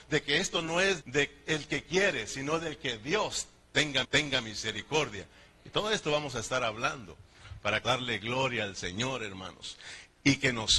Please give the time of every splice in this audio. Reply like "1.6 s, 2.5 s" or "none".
1.0 s, 4.0 s, 7.8 s